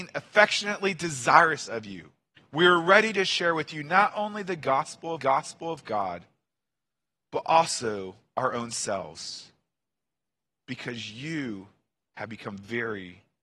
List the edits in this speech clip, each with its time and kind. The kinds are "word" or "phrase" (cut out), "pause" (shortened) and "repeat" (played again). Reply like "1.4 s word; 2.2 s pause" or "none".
2.3 s pause; 5.2 s repeat